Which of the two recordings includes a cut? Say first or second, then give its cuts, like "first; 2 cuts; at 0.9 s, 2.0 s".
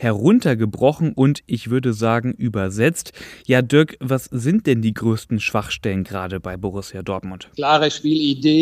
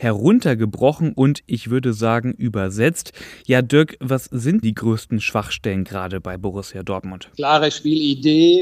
second; 1 cut; at 4.6 s